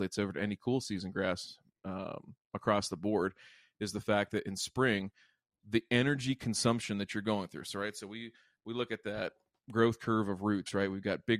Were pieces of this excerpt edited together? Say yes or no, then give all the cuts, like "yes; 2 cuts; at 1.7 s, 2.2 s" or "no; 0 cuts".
no; 0 cuts